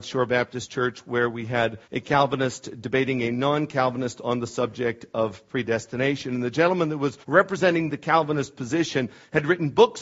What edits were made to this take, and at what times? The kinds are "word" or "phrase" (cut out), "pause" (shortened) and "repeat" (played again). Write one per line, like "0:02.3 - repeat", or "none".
0:01.8 - pause
0:07.2 - pause

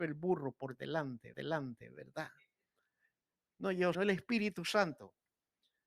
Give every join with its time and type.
0:01.3 - repeat
0:03.9 - word

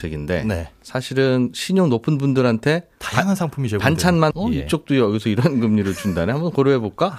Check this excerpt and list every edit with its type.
0:04.3 - word

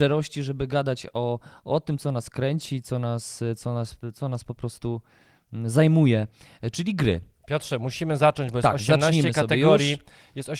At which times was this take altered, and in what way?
none

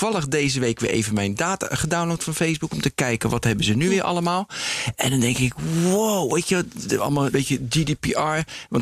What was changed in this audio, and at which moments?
0:07.3 - word

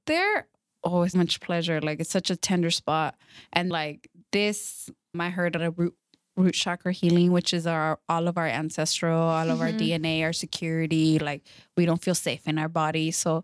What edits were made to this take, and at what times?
0:01.1 - word
0:03.7 - word
0:05.1 - word
0:05.6 - word

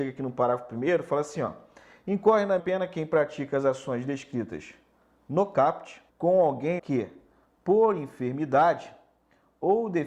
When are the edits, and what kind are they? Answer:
0:02.6 - word
0:06.1 - pause
0:06.8 - word

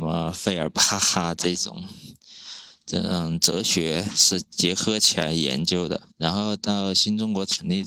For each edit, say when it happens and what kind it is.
0:06.1 - pause

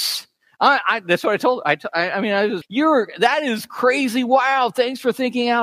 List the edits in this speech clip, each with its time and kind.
0:02.6 - word

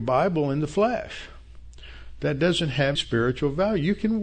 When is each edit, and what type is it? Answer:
0:03.0 - word

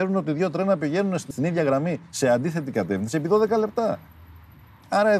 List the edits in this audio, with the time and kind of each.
0:01.3 - word

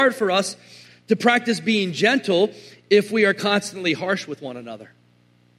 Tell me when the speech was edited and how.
none

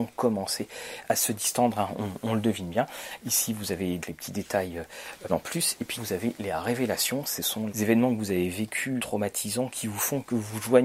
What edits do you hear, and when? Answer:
0:01.1 - word
0:04.0 - word
0:05.3 - word
0:06.0 - word
0:07.7 - word
0:09.0 - word

